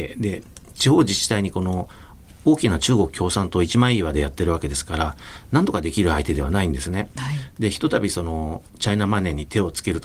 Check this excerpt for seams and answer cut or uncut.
cut